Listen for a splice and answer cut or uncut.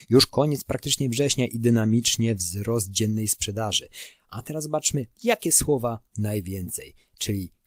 uncut